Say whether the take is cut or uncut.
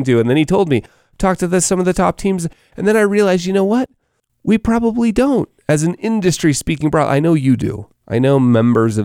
uncut